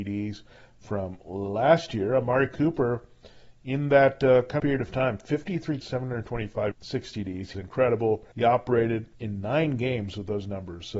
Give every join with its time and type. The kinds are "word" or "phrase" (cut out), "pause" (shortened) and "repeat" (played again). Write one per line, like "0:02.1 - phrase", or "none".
0:04.6 - phrase
0:05.8 - word
0:06.7 - word
0:07.5 - word
0:08.3 - pause
0:09.1 - pause